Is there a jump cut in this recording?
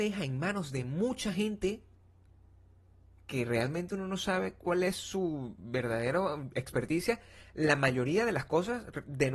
no; 0 cuts

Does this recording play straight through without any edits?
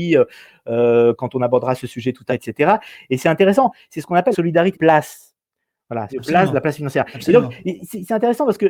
no; 4 cuts; at 2.3 s, 4.3 s, 4.7 s, 6.1 s

